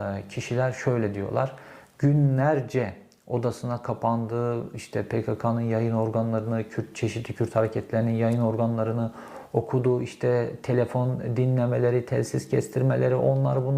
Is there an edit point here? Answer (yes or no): no